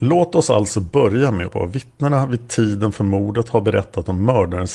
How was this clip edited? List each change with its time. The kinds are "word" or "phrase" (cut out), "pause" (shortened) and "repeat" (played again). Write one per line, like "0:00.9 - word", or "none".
0:01.5 - phrase